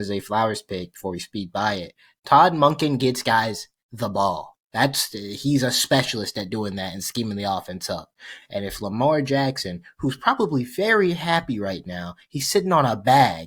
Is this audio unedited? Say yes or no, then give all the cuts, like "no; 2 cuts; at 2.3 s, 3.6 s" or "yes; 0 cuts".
yes; 0 cuts